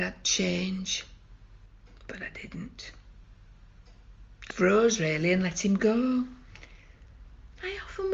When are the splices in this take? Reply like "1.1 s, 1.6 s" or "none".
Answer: 4.5 s